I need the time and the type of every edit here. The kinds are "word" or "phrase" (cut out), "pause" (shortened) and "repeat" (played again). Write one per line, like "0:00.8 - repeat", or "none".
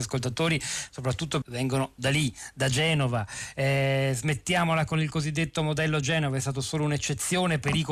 0:01.4 - word
0:02.0 - word